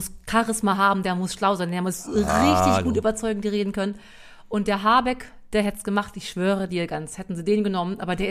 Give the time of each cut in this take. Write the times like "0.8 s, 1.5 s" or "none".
none